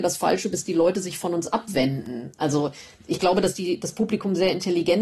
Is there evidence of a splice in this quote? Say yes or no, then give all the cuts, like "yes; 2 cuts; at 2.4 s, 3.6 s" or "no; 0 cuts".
no; 0 cuts